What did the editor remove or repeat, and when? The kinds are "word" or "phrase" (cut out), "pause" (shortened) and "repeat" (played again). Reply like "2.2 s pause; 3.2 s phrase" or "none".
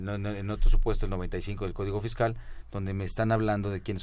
none